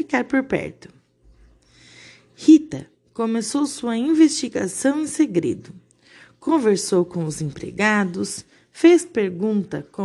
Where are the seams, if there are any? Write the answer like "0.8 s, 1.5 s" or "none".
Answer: none